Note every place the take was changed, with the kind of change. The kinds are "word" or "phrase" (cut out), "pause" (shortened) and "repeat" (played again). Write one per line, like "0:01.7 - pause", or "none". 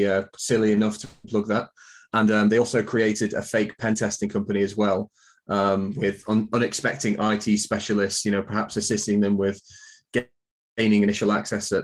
0:01.2 - word